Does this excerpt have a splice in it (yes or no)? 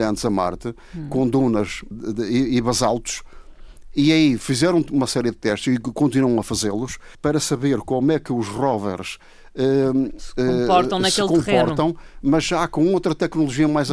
yes